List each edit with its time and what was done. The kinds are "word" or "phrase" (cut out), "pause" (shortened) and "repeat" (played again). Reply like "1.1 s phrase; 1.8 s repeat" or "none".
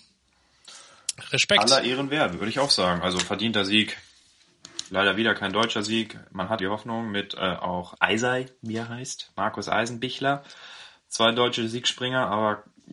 6.6 s phrase; 7.9 s word